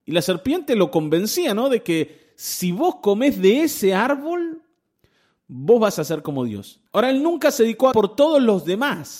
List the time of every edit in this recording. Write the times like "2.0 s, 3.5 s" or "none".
6.9 s, 7.9 s